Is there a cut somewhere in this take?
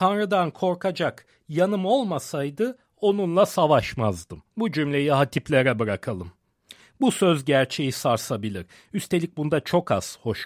yes; 1 cut; at 4.5 s

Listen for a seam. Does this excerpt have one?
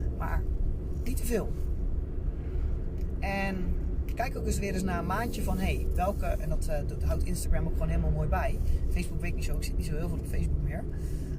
no; 0 cuts

